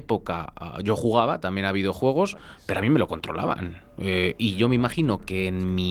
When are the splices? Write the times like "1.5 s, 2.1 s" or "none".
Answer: none